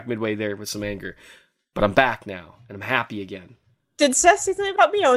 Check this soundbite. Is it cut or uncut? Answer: uncut